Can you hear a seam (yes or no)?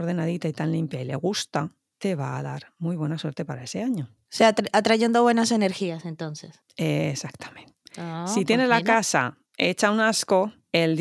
no